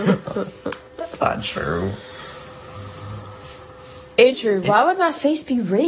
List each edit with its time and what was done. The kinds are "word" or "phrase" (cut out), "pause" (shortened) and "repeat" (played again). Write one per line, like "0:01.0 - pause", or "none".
0:04.3 - phrase

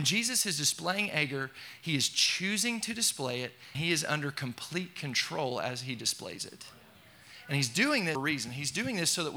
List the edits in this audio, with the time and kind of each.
0:03.7 - word
0:08.1 - word

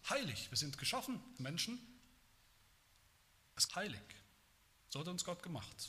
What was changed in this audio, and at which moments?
0:01.4 - word
0:03.7 - phrase

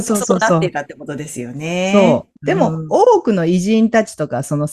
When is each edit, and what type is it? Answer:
0:02.4 - pause

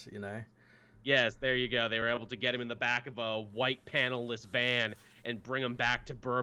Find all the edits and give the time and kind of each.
none

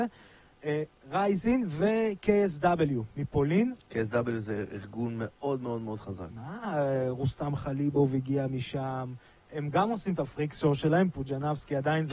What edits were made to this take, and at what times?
none

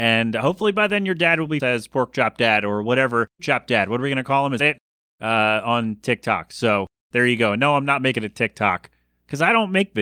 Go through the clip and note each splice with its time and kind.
0:01.6 - word
0:03.4 - word
0:04.6 - word

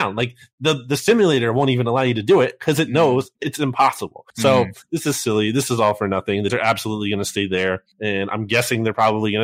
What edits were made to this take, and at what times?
0:04.3 - pause
0:04.8 - pause
0:06.5 - word
0:07.9 - pause

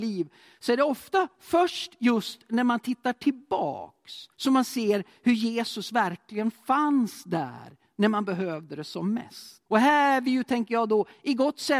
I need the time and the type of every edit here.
0:04.3 - pause
0:09.7 - pause

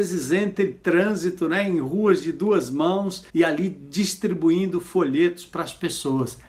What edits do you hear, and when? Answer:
0:03.3 - pause

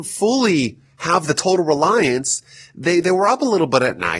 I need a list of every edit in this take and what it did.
none

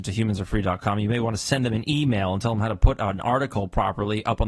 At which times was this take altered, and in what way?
none

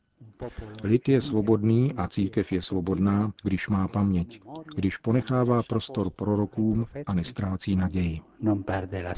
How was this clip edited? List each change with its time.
0:03.4 - pause

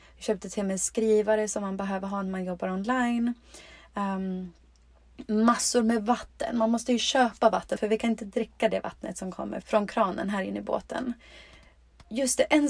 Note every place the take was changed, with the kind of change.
0:07.8 - word
0:09.6 - word

